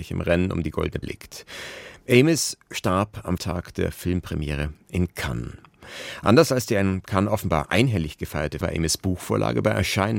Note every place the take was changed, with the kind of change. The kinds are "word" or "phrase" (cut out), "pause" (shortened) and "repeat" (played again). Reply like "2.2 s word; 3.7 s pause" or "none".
1.0 s word; 3.4 s phrase; 8.6 s word